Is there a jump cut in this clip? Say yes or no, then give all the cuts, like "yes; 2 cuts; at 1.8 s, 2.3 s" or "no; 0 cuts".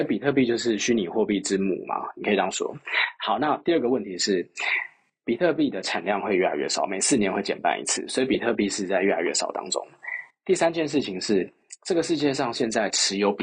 no; 0 cuts